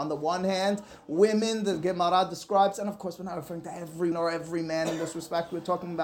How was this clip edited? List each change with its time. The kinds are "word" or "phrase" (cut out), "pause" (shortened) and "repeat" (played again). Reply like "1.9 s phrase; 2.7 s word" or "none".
4.1 s word